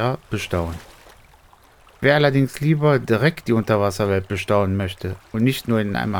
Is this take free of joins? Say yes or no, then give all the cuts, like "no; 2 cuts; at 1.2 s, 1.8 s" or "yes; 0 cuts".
yes; 0 cuts